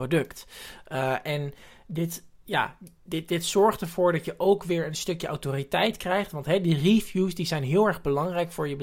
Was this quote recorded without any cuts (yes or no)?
yes